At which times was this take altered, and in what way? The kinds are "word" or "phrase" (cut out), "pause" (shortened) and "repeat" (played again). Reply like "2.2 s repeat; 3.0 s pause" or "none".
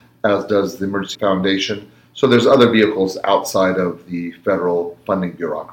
1.1 s word